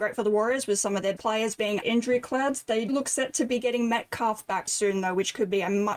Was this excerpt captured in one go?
no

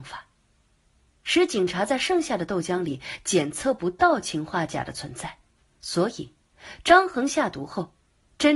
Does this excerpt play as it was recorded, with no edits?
no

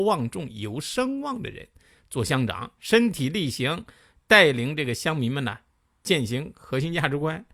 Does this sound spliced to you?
yes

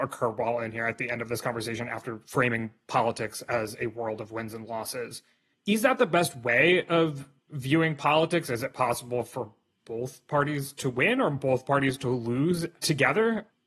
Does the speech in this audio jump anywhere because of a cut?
no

